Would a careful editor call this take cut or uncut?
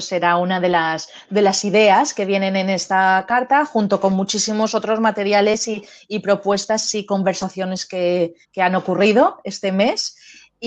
cut